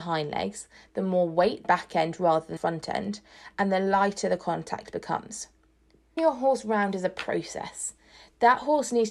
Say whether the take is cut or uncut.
cut